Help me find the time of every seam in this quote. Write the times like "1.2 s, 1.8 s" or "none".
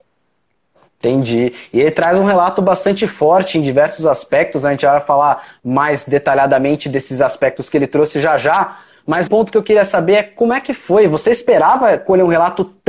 9.3 s